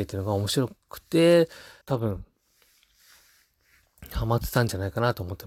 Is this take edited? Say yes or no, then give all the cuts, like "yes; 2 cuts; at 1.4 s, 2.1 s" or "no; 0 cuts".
yes; 1 cut; at 1.8 s